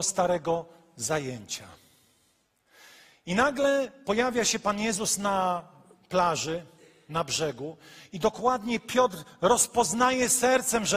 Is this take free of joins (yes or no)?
yes